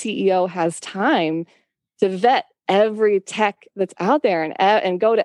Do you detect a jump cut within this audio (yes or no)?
no